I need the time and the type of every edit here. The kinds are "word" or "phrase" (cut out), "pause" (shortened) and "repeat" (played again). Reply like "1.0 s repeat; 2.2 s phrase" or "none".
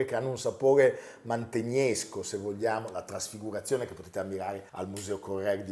4.7 s pause